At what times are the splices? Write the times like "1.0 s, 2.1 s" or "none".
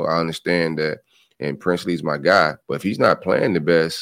2.6 s